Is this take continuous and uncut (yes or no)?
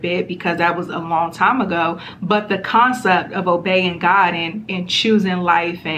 yes